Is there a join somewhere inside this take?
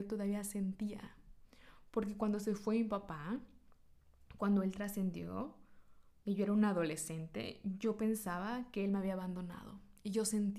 no; 0 cuts

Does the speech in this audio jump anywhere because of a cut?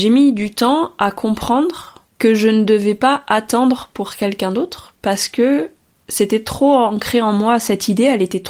no; 0 cuts

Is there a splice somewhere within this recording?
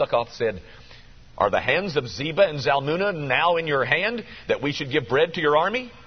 no; 0 cuts

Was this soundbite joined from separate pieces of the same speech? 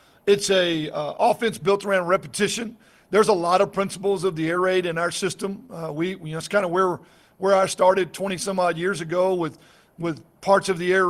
no; 0 cuts

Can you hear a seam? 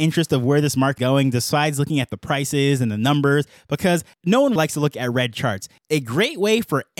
yes; 2 cuts; at 1.0 s, 4.6 s

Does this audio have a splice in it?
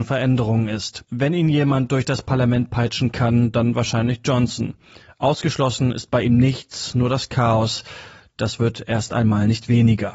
no; 0 cuts

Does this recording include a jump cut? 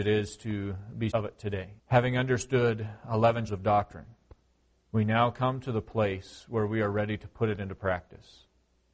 yes; 4 cuts; at 1.1 s, 1.8 s, 3.5 s, 4.7 s

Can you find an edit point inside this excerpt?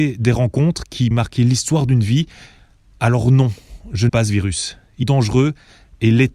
yes; 3 cuts; at 1.1 s, 4.1 s, 5.0 s

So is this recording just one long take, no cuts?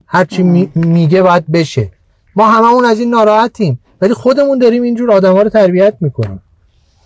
yes; 0 cuts

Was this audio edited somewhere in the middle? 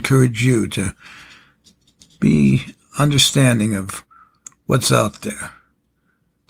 no; 0 cuts

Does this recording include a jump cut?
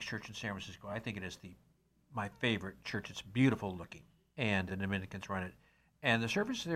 yes; 1 cut; at 4.7 s

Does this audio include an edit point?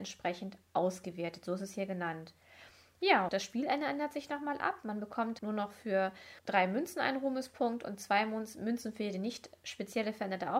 yes; 3 cuts; at 3.3 s, 5.4 s, 6.4 s

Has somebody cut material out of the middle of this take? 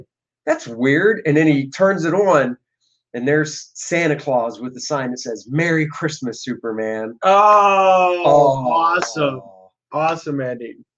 no; 0 cuts

